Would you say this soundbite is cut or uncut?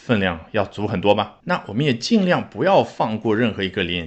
cut